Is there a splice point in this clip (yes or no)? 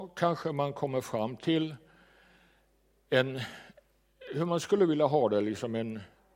no